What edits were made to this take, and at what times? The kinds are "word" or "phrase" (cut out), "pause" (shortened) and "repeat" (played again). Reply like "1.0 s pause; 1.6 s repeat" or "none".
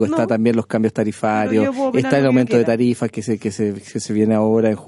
none